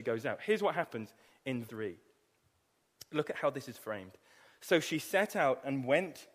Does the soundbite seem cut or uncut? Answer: cut